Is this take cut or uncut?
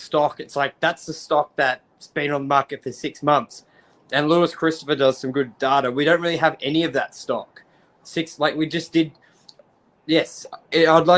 uncut